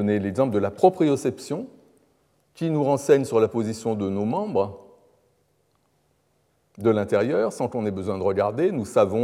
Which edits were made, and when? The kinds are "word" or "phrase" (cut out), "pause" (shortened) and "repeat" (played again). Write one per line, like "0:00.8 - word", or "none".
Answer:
none